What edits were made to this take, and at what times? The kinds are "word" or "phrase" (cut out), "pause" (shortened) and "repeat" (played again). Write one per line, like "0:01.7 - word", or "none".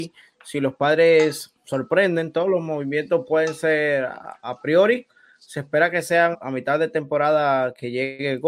0:04.4 - word
0:06.3 - word